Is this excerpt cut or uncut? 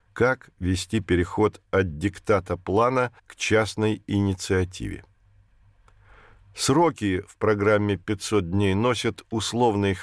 cut